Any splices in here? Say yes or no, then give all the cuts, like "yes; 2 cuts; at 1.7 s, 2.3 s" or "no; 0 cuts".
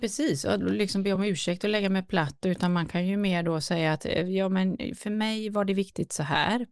no; 0 cuts